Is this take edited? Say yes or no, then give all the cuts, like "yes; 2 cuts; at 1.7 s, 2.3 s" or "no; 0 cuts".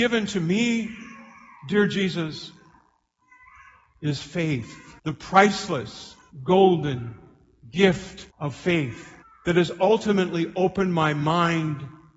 yes; 4 cuts; at 5.0 s, 6.3 s, 8.3 s, 9.2 s